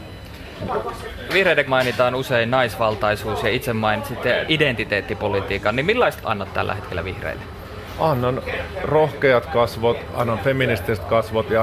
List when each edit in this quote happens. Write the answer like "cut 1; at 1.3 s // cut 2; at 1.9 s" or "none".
cut 1; at 1.3 s // cut 2; at 1.7 s // cut 3; at 4.5 s // cut 4; at 6.2 s

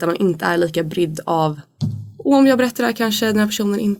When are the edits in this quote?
none

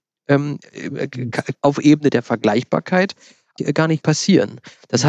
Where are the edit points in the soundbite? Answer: cut 1; at 1.5 s // cut 2; at 3.6 s // cut 3; at 4.0 s

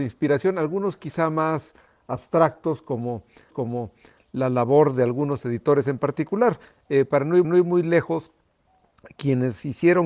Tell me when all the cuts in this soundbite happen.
cut 1; at 3.5 s // cut 2; at 7.4 s

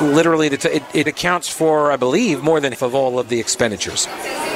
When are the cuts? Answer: cut 1; at 1.1 s // cut 2; at 2.7 s

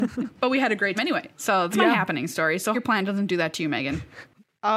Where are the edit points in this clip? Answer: cut 1; at 0.9 s // cut 2; at 1.7 s // cut 3; at 2.7 s

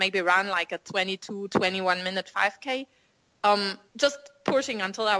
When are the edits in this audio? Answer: cut 1; at 3.9 s

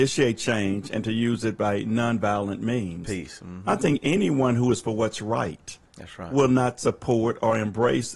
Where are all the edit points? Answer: none

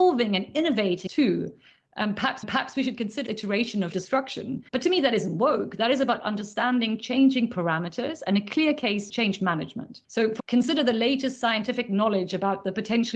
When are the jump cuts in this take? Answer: cut 1; at 1.1 s // cut 2; at 2.4 s // cut 3; at 3.3 s // cut 4; at 3.9 s // cut 5; at 4.7 s // cut 6; at 9.1 s // cut 7; at 10.0 s // cut 8; at 10.4 s

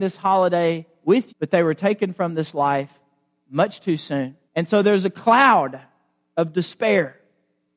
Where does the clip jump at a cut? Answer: cut 1; at 1.3 s // cut 2; at 4.5 s

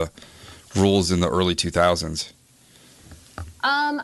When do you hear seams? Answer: none

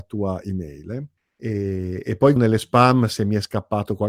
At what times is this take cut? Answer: cut 1; at 1.2 s // cut 2; at 2.4 s

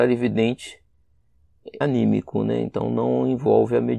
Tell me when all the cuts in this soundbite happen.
cut 1; at 1.8 s

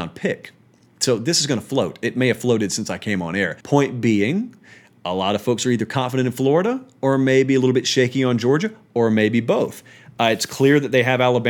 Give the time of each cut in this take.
cut 1; at 3.6 s

